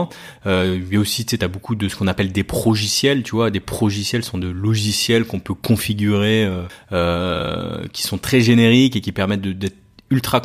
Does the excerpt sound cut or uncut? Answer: uncut